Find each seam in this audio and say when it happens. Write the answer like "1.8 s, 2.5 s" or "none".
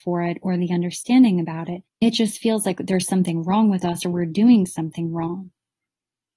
1.9 s